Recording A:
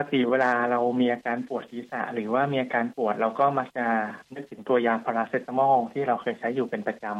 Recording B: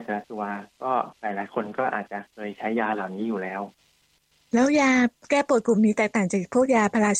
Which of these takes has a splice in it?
A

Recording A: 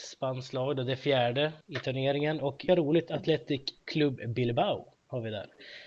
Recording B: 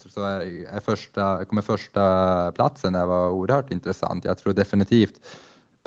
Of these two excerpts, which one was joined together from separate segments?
A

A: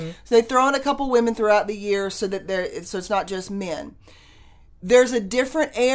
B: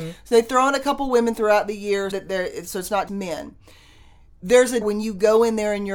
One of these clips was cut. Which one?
B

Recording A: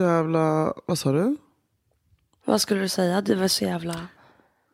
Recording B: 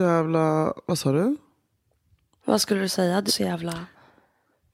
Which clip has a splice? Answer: B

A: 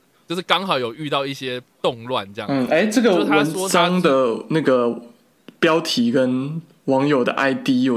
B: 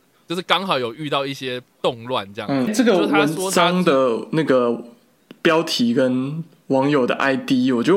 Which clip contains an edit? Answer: B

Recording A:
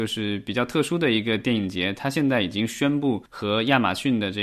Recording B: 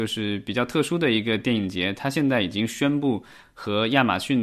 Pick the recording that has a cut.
A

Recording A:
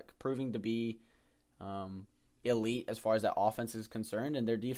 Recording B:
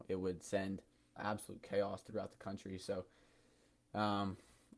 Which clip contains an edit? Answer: B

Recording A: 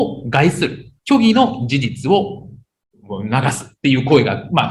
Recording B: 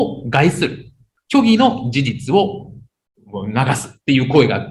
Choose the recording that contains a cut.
A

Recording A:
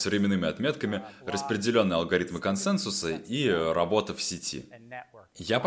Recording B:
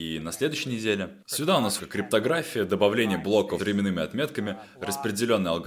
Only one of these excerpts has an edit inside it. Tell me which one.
B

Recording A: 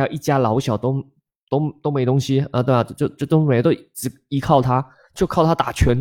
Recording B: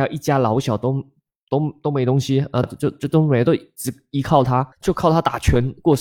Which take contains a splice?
B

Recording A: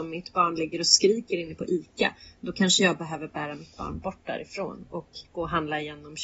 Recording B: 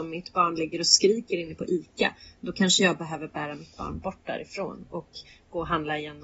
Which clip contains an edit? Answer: A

